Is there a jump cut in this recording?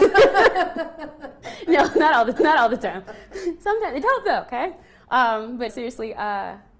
yes; 3 cuts; at 2.4 s, 4.0 s, 5.7 s

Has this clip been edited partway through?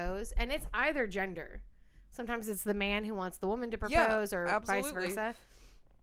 no; 0 cuts

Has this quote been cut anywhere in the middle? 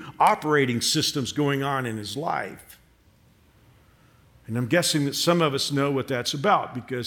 no; 0 cuts

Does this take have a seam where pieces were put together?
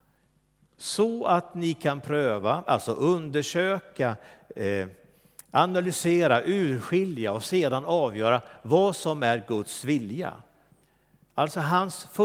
no; 0 cuts

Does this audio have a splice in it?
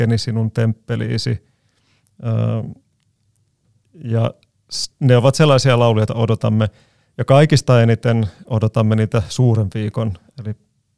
yes; 1 cut; at 6.1 s

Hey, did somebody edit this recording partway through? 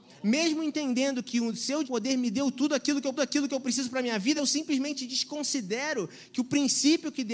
yes; 3 cuts; at 1.8 s, 3.2 s, 4.4 s

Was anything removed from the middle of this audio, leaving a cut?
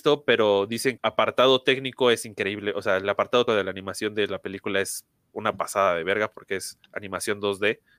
yes; 2 cuts; at 1.0 s, 3.5 s

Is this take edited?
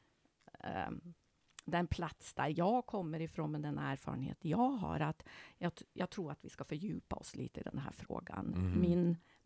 no; 0 cuts

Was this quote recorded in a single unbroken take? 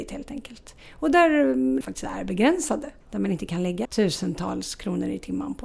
no; 3 cuts; at 1.8 s, 3.0 s, 3.8 s

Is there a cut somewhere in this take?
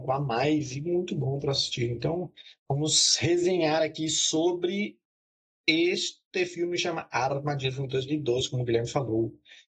no; 0 cuts

